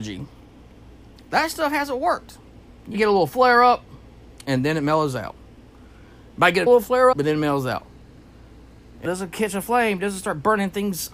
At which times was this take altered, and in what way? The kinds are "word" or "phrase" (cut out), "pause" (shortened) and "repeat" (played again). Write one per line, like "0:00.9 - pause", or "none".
0:02.9 - word
0:06.7 - word
0:07.1 - word
0:09.1 - phrase